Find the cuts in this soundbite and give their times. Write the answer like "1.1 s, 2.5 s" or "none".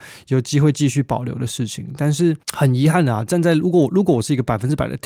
2.4 s